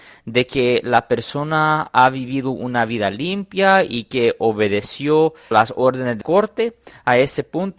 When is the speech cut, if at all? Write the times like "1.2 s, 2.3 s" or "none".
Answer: 5.5 s, 6.2 s